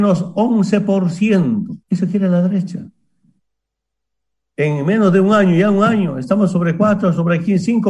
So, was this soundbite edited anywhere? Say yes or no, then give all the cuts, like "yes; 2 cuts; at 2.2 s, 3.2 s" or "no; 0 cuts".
yes; 1 cut; at 1.8 s